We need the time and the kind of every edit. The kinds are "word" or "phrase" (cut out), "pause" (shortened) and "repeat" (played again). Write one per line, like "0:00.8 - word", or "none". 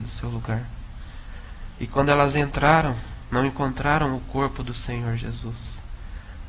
none